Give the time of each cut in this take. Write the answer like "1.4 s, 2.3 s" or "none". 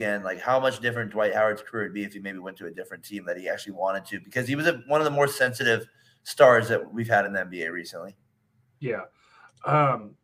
none